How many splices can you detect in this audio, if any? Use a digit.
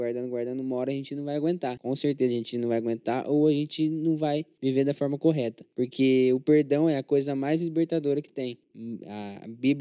0